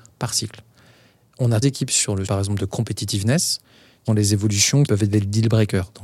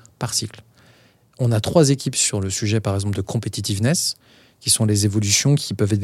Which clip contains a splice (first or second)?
first